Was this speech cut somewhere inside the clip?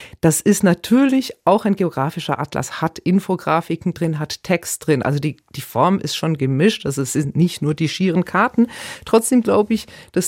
no; 0 cuts

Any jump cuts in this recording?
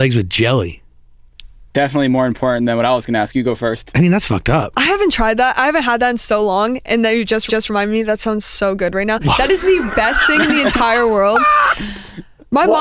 yes; 1 cut; at 7.5 s

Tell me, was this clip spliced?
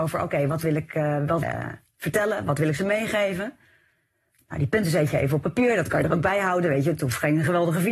yes; 1 cut; at 1.4 s

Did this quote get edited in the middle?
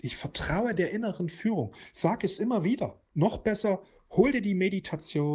yes; 1 cut; at 3.1 s

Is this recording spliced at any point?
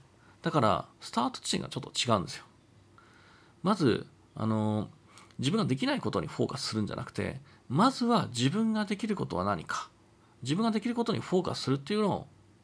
no; 0 cuts

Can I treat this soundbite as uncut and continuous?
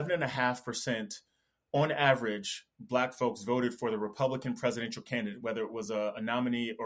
yes; 0 cuts

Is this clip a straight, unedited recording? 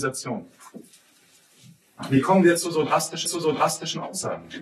no; 1 cut; at 3.3 s

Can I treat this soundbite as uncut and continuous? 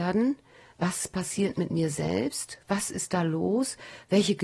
yes; 0 cuts

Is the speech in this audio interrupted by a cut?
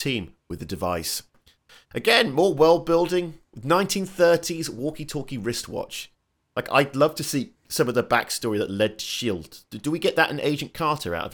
no; 0 cuts

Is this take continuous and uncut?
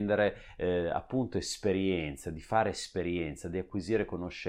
yes; 0 cuts

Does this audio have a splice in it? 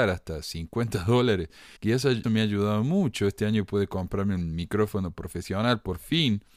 yes; 2 cuts; at 1.8 s, 2.2 s

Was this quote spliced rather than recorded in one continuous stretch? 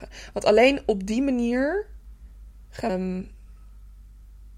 yes; 1 cut; at 2.9 s

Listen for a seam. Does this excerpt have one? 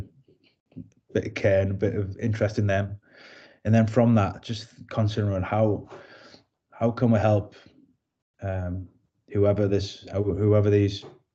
no; 0 cuts

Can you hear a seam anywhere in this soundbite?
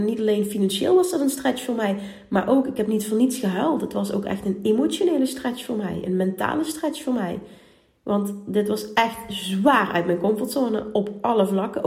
no; 0 cuts

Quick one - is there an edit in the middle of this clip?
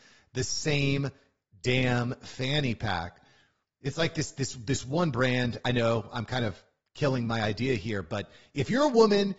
no; 0 cuts

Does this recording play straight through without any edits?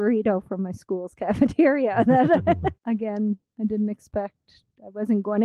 no; 2 cuts; at 2.8 s, 3.5 s

